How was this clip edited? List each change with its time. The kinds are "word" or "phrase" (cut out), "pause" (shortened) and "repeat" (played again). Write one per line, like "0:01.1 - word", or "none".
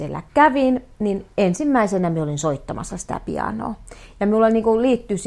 none